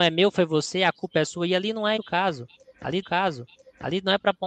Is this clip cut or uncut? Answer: cut